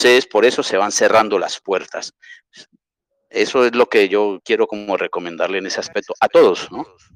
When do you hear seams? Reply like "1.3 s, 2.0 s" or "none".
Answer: none